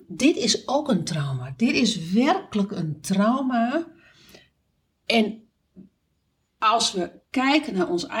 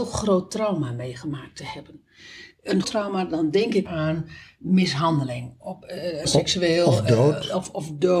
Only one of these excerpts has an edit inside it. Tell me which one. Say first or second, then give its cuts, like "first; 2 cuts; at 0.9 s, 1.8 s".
second; 3 cuts; at 2.8 s, 3.8 s, 6.2 s